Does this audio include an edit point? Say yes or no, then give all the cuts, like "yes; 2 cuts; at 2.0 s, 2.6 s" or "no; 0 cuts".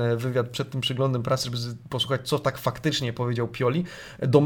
no; 0 cuts